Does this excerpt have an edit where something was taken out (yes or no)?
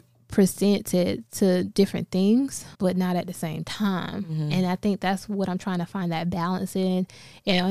yes